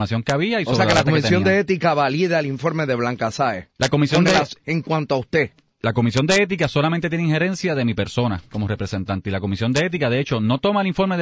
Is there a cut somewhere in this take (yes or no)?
no